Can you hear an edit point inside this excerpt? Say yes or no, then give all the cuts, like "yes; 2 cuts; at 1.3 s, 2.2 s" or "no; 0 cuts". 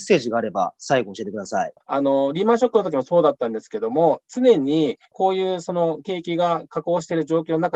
yes; 2 cuts; at 1.8 s, 5.1 s